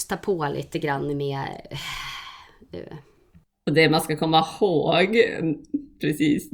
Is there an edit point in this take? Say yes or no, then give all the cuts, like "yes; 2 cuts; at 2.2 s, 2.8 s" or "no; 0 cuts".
no; 0 cuts